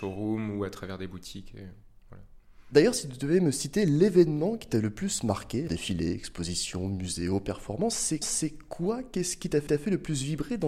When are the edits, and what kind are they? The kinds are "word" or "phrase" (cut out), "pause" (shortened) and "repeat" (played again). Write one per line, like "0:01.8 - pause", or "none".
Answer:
0:05.7 - word
0:08.2 - repeat
0:09.7 - repeat